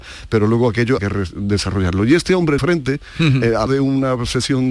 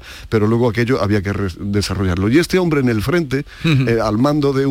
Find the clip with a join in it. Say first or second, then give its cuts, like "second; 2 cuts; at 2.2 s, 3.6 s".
first; 3 cuts; at 1.0 s, 2.6 s, 3.7 s